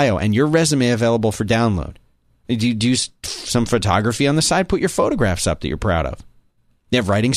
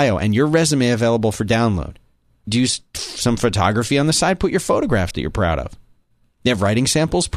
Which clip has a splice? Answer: second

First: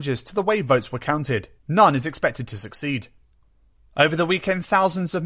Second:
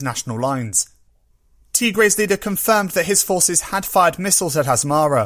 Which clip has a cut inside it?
first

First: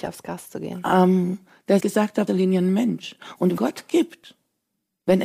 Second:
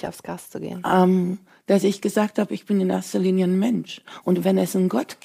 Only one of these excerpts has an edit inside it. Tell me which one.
first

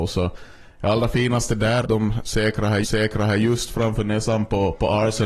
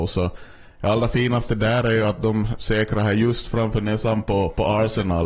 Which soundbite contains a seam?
first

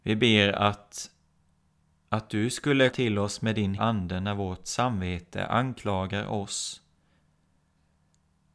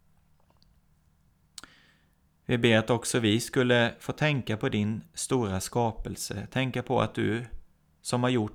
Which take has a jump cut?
first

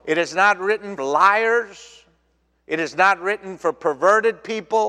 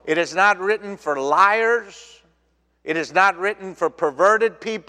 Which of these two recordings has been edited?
first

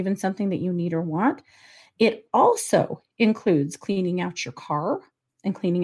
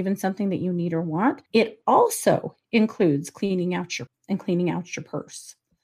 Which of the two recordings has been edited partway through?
second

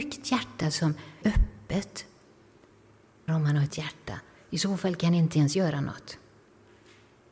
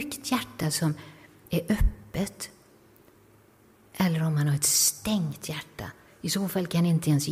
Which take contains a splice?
first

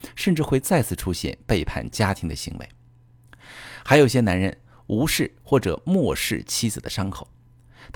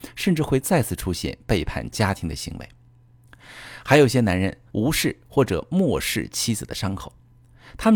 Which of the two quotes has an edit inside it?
second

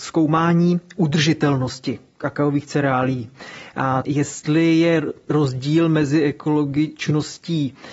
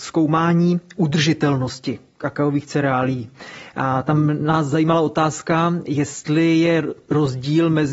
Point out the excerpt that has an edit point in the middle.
first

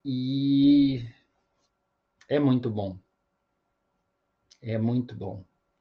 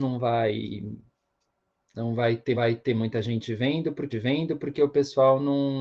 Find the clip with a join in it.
second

